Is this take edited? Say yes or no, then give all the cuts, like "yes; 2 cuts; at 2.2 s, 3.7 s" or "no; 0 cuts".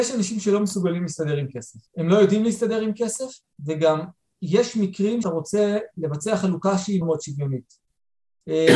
yes; 3 cuts; at 1.9 s, 5.2 s, 7.0 s